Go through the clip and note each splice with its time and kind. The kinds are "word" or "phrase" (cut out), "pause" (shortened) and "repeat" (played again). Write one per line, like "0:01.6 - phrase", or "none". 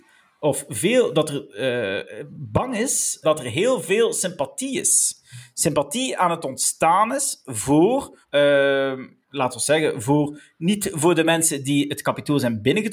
0:03.2 - word
0:08.2 - pause